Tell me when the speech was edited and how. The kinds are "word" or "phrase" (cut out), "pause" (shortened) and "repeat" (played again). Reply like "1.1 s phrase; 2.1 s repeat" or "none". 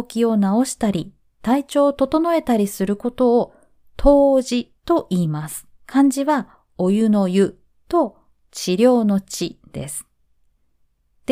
5.8 s pause